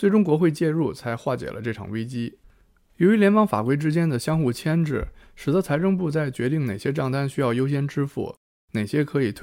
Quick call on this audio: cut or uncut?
uncut